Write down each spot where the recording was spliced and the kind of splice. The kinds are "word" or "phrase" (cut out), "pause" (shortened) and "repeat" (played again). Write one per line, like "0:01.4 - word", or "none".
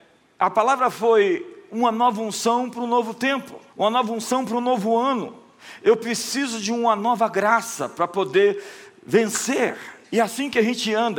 0:03.7 - pause
0:10.0 - pause

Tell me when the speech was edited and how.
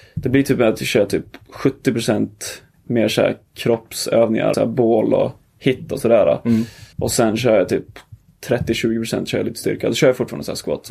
0:02.7 - pause
0:04.5 - word
0:06.9 - pause

